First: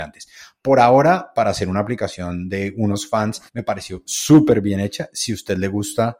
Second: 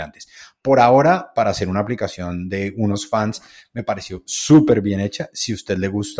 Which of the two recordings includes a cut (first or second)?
first